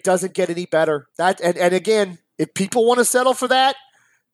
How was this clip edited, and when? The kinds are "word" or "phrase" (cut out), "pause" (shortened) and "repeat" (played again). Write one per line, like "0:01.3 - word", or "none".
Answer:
0:01.1 - pause